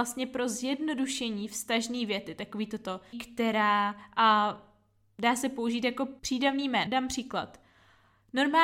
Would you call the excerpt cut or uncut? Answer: cut